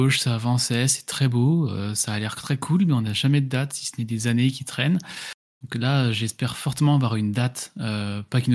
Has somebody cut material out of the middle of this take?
no; 0 cuts

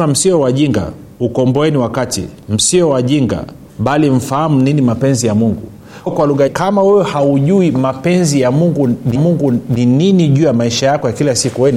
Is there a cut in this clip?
yes; 6 cuts; at 1.1 s, 2.4 s, 3.7 s, 6.1 s, 6.5 s, 9.2 s

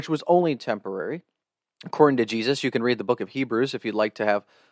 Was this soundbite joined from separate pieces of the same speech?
yes; 1 cut; at 1.4 s

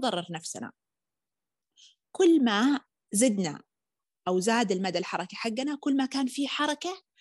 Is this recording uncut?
yes; 0 cuts

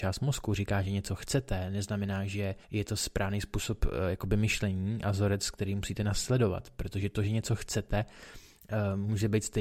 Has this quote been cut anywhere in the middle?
yes; 1 cut; at 2.6 s

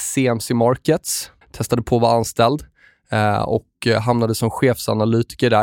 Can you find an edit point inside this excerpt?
yes; 1 cut; at 1.4 s

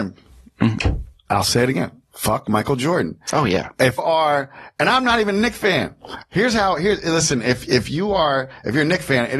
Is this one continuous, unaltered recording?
no; 1 cut; at 4.0 s

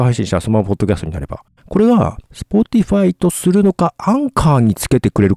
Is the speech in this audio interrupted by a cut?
yes; 2 cuts; at 1.5 s, 2.3 s

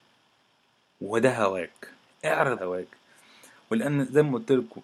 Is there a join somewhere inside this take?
yes; 1 cut; at 2.6 s

